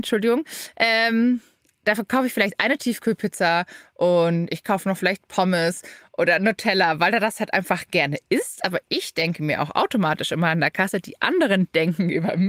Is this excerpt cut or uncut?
uncut